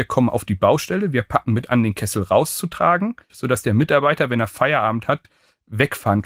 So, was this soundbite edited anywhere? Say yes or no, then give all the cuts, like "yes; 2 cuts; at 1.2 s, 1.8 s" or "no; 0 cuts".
yes; 1 cut; at 3.2 s